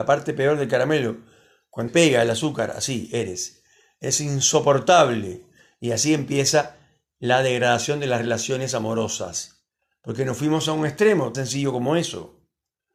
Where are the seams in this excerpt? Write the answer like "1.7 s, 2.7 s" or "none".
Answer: 1.9 s, 11.3 s